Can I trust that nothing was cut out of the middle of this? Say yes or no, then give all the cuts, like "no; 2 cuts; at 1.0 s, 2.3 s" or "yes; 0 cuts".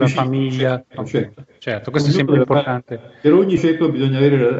no; 2 cuts; at 0.9 s, 3.6 s